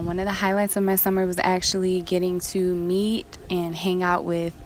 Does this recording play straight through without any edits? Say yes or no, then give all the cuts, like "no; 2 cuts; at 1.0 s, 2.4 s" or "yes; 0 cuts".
yes; 0 cuts